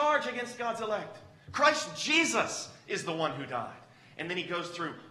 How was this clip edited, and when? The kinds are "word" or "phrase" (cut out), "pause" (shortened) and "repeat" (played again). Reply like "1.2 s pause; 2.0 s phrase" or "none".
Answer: none